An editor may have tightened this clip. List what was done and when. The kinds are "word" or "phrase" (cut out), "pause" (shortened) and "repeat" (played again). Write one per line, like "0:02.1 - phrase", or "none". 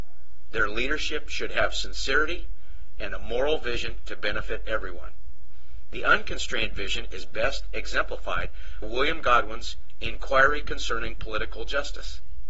0:08.8 - word